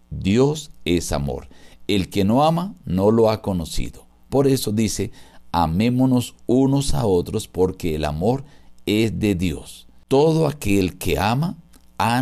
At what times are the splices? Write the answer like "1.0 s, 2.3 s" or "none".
none